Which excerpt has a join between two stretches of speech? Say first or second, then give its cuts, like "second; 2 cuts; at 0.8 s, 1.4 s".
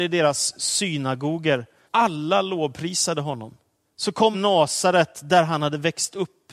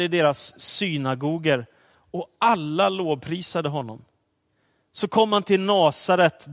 first; 3 cuts; at 1.9 s, 3.8 s, 4.3 s